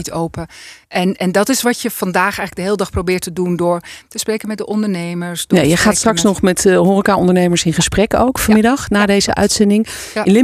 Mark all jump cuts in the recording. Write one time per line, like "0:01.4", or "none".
none